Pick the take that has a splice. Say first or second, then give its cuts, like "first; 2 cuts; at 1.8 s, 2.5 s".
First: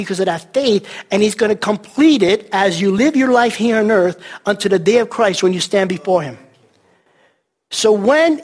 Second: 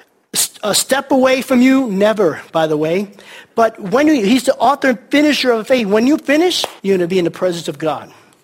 second; 1 cut; at 6.8 s